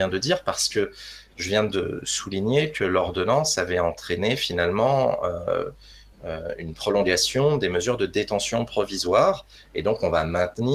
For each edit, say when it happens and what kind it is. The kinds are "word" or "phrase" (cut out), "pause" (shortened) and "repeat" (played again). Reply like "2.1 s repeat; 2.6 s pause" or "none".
none